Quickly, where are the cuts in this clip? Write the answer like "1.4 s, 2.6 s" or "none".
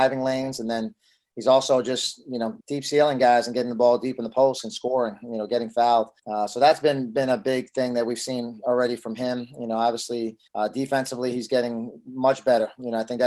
2.6 s, 6.2 s, 10.5 s